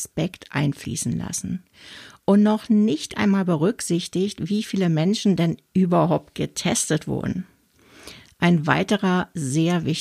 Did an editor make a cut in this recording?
no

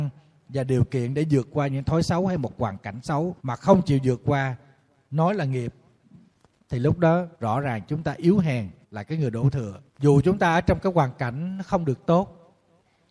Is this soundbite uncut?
no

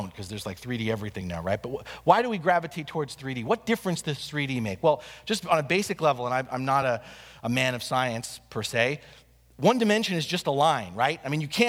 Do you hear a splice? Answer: no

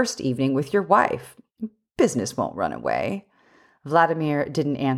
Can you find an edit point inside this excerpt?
no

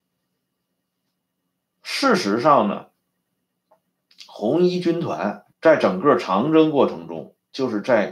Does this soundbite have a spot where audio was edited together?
yes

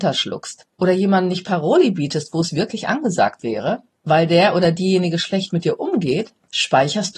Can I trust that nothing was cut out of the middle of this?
yes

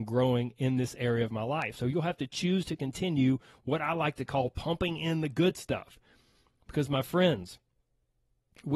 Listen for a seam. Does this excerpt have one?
no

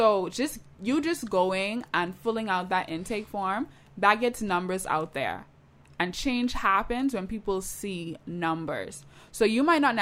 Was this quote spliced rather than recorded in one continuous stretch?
no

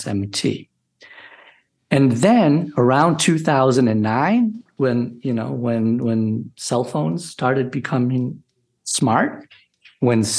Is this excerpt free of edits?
yes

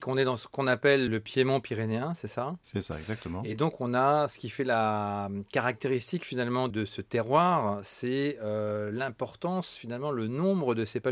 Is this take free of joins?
no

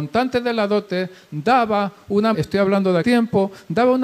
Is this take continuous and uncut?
no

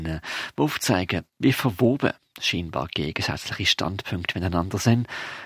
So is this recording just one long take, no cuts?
yes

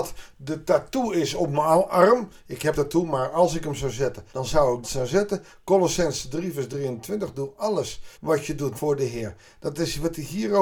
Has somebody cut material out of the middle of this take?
yes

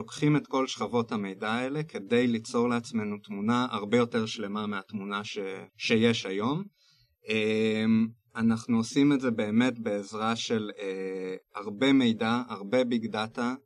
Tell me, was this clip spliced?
yes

